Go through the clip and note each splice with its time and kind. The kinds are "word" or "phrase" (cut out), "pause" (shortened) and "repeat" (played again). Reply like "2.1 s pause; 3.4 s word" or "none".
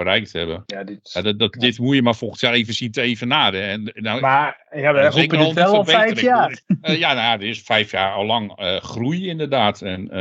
none